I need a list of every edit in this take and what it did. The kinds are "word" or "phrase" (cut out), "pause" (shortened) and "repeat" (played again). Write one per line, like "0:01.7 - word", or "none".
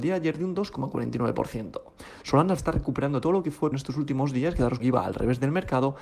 0:02.6 - word
0:03.7 - word
0:04.8 - word